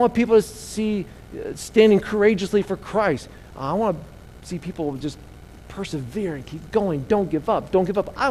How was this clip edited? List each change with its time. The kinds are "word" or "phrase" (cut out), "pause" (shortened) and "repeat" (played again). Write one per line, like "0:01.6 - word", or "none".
none